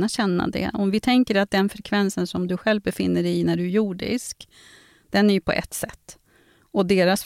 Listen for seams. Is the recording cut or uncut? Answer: uncut